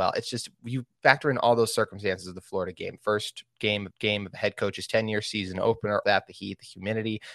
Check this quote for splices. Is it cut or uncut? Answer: cut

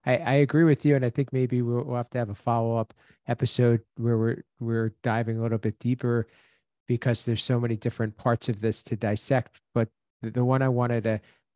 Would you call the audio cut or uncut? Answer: uncut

